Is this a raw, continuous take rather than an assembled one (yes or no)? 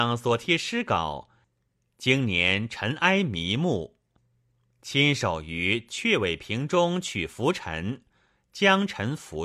yes